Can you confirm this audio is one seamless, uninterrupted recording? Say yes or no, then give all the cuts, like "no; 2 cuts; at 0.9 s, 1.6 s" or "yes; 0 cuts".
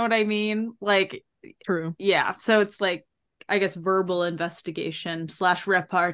yes; 0 cuts